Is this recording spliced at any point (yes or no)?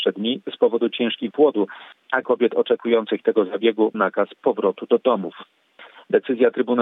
yes